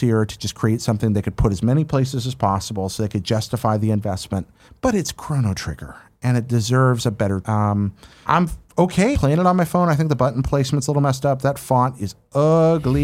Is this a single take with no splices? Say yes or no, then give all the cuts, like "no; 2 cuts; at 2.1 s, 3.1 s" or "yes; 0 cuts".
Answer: no; 4 cuts; at 4.7 s, 7.4 s, 8.2 s, 9.1 s